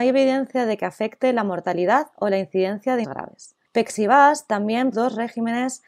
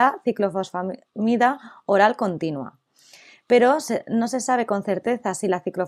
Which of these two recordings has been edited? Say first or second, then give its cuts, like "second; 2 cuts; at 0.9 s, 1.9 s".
first; 3 cuts; at 3.0 s, 3.6 s, 4.9 s